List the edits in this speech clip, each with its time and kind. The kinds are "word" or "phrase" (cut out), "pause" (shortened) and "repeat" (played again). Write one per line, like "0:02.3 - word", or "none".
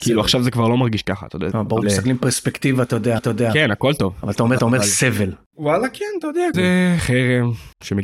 0:01.5 - phrase
0:01.8 - word
0:03.2 - repeat
0:04.6 - repeat
0:06.5 - word